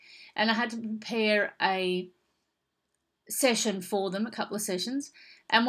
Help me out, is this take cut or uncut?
uncut